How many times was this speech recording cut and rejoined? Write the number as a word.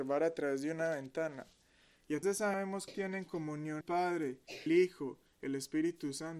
five